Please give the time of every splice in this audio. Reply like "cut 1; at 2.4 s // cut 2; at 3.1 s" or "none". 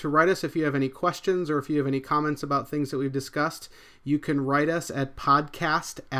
none